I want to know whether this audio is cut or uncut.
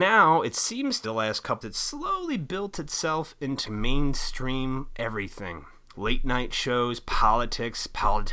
cut